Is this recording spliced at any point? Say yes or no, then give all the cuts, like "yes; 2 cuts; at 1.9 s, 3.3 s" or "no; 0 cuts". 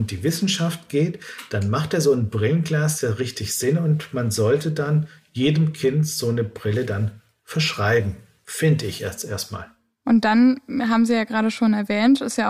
no; 0 cuts